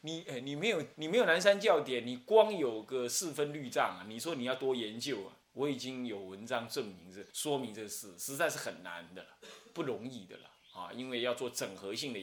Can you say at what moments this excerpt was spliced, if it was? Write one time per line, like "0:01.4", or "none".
0:00.9
0:05.4
0:07.3

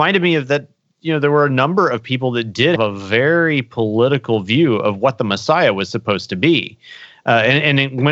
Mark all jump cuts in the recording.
0:02.8

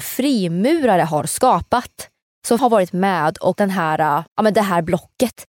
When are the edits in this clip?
0:02.6
0:03.5
0:04.3

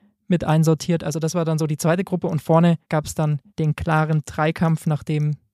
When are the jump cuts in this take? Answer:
0:02.8
0:03.5

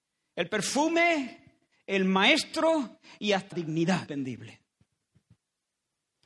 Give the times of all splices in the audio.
0:03.5
0:04.1

